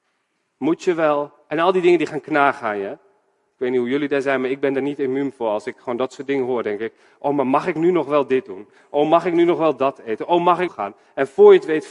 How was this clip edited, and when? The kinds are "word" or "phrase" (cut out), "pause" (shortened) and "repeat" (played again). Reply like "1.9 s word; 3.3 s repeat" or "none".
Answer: 1.4 s pause; 10.7 s phrase

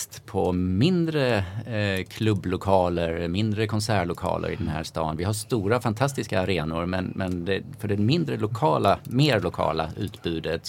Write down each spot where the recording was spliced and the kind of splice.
none

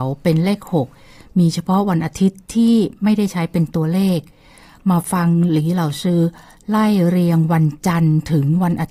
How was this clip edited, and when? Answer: none

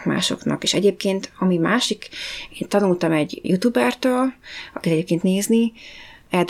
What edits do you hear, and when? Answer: 3.4 s word; 5.2 s word

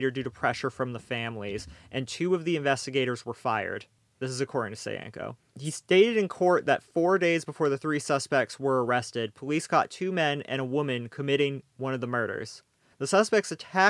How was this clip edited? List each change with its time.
none

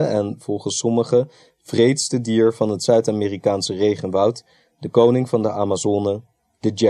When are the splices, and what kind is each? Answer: none

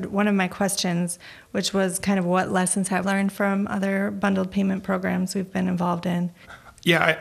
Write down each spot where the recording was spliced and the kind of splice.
3.0 s word

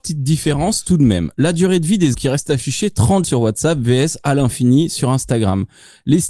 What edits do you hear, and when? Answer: 2.1 s word; 3.2 s word

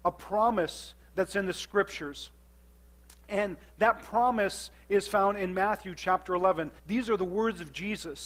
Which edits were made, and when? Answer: 6.8 s pause

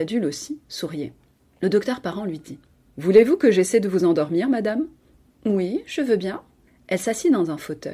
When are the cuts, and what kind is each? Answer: none

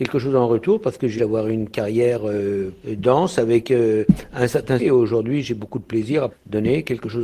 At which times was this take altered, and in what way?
1.2 s phrase; 2.8 s word; 4.8 s word; 6.3 s word

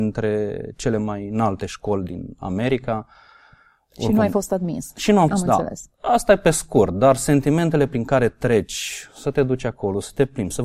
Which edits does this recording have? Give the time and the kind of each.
5.3 s phrase

